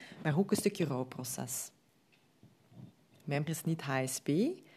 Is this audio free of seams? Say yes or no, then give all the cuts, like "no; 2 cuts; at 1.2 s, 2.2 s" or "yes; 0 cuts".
no; 1 cut; at 3.5 s